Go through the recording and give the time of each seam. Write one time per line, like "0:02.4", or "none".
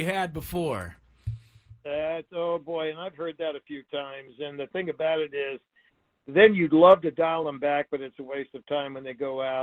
none